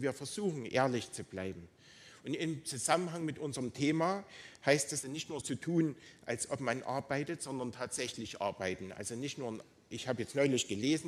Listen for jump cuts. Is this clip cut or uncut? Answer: cut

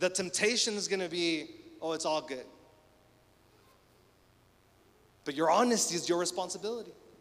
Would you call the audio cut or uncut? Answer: uncut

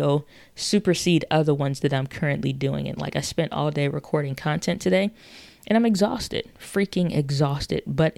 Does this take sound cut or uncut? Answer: uncut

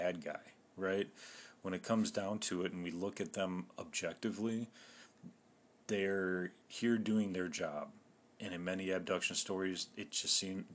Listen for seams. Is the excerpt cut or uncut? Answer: uncut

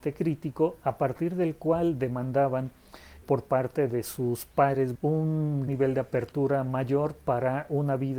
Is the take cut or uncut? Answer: cut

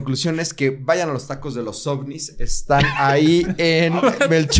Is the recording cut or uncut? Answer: uncut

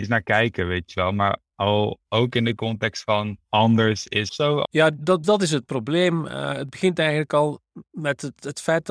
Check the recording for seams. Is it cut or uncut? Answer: cut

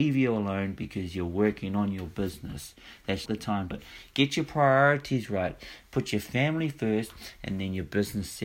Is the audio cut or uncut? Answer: cut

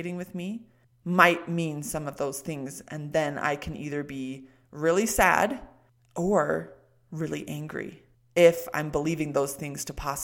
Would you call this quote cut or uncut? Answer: uncut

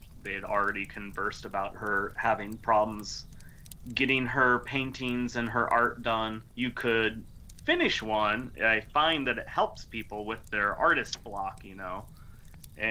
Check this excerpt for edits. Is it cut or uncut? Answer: cut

